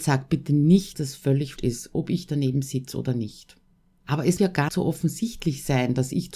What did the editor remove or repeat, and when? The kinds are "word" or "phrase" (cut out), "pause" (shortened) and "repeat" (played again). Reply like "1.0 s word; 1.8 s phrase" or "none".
0.9 s word; 1.6 s word; 3.7 s pause; 4.4 s word; 4.7 s word